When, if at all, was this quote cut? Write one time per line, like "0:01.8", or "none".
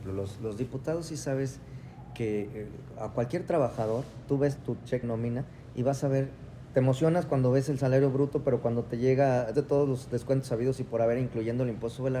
0:04.6
0:05.0
0:09.5